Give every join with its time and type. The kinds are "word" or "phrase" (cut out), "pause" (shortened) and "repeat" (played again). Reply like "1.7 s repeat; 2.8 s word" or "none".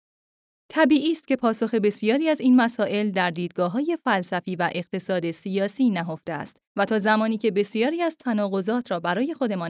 6.7 s pause